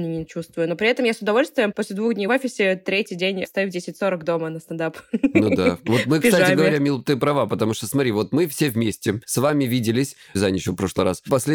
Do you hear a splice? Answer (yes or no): no